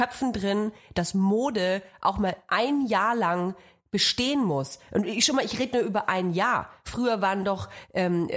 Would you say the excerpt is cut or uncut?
uncut